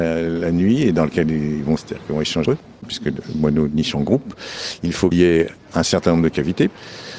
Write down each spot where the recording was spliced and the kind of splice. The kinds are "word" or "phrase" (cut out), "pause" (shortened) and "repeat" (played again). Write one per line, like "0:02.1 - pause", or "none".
0:01.8 - word
0:02.5 - word
0:05.1 - word